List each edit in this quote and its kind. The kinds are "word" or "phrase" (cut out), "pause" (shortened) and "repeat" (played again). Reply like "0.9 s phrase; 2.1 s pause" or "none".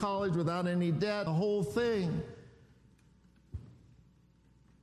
1.3 s word